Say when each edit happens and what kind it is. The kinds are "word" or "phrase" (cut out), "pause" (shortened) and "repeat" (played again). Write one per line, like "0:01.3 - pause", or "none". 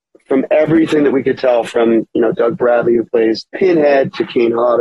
0:03.5 - pause